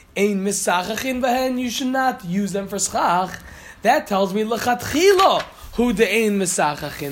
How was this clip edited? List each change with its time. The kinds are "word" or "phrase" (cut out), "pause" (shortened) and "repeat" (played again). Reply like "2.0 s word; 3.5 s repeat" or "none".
none

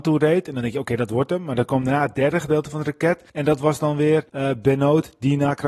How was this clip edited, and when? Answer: 3.3 s pause; 4.3 s pause

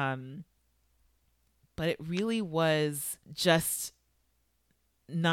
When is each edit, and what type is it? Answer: 3.2 s pause

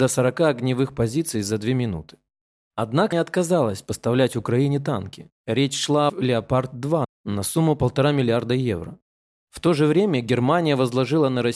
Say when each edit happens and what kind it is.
3.1 s word; 6.1 s phrase

